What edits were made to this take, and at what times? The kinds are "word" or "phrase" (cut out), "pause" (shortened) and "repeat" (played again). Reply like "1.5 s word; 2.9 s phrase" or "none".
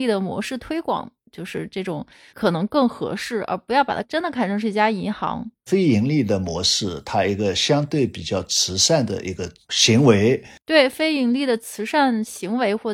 none